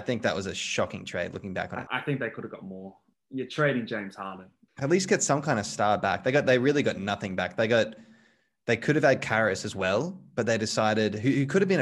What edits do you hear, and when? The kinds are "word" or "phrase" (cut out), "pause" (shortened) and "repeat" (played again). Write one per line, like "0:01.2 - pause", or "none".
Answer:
0:01.9 - word
0:03.1 - word
0:04.7 - word